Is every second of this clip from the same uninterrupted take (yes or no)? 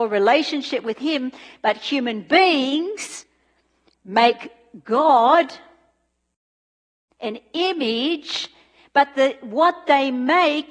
yes